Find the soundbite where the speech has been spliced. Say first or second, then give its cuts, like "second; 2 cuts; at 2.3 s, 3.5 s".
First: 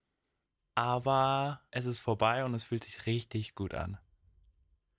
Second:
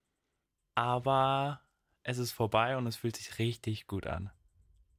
first; 1 cut; at 1.7 s